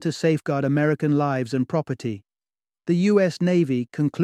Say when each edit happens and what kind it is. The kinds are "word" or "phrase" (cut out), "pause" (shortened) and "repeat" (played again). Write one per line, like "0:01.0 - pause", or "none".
none